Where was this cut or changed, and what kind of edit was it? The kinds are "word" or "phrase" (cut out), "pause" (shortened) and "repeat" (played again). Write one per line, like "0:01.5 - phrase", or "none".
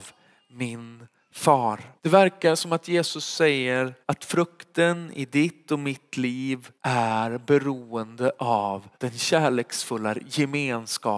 0:02.0 - pause
0:04.0 - pause
0:06.8 - pause
0:08.9 - pause